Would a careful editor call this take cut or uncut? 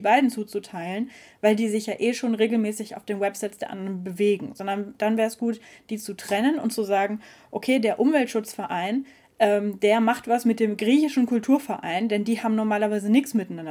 uncut